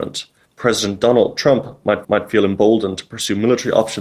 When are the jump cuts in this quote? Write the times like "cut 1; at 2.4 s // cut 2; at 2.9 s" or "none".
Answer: cut 1; at 2.0 s